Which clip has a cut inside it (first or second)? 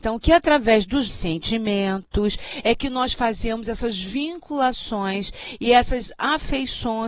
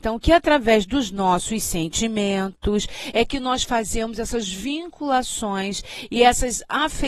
first